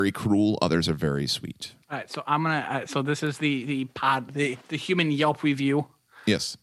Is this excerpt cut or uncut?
cut